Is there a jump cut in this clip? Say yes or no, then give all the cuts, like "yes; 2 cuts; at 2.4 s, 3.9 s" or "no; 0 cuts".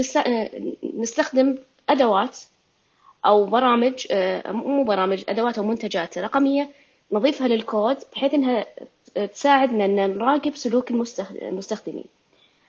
no; 0 cuts